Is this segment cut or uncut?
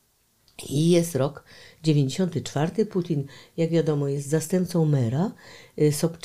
uncut